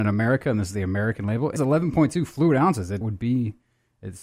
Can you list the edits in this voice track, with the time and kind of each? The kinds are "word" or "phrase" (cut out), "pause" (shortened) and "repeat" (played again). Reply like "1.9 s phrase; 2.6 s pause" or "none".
1.6 s word; 3.0 s phrase